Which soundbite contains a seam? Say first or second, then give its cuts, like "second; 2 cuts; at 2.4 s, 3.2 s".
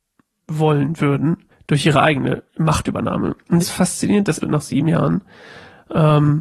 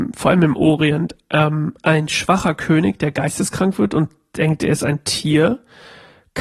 first; 4 cuts; at 1.5 s, 2.5 s, 3.6 s, 4.4 s